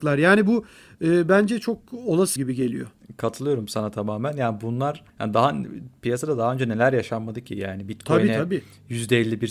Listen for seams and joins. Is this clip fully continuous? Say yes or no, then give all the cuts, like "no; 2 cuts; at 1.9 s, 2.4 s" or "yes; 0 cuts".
no; 2 cuts; at 2.4 s, 5.1 s